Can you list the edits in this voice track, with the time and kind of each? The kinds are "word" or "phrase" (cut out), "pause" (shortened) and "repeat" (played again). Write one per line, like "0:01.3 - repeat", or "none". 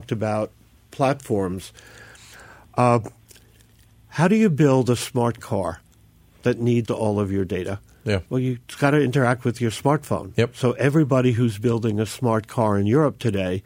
0:06.9 - word
0:08.3 - pause

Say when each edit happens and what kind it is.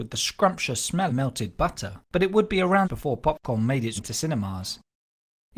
0:01.1 - word
0:02.0 - pause
0:02.8 - phrase
0:04.0 - word

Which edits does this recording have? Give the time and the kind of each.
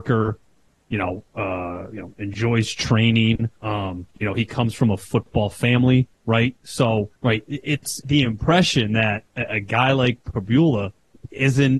0:03.6 - pause
0:06.1 - pause
0:07.1 - pause
0:08.0 - phrase

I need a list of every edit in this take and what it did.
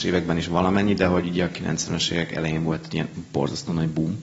none

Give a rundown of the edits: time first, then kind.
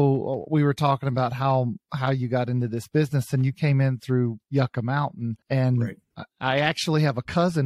0:04.4 - pause
0:05.4 - pause

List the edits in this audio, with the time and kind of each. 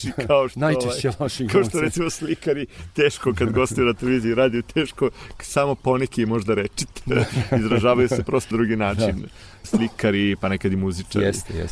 0:08.5 - word

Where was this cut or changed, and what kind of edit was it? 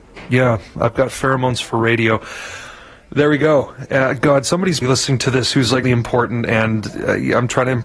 0:04.8 - word
0:05.8 - word

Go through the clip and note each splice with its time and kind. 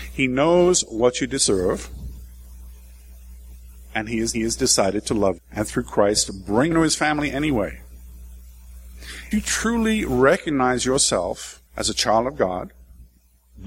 0:04.3 - repeat
0:05.4 - word
0:06.7 - word
0:09.3 - word
0:11.7 - pause

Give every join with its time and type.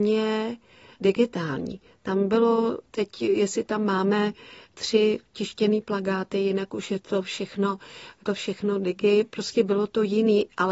0:08.2 - word

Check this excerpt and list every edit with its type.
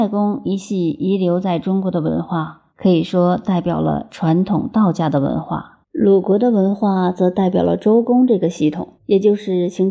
0:02.7 - pause
0:05.8 - pause
0:09.0 - pause

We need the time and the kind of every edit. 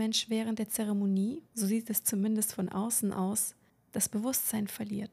0:01.5 - pause

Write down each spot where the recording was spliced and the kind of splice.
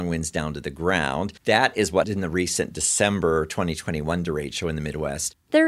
0:01.4 - pause
0:02.0 - word

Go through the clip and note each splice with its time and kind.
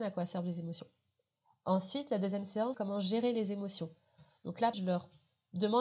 0:02.7 - word
0:04.7 - word

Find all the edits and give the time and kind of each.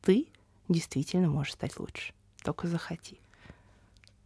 none

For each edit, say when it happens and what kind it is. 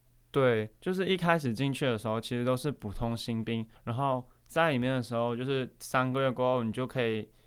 0:03.8 - pause

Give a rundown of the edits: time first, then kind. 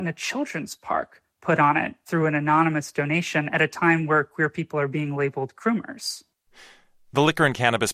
none

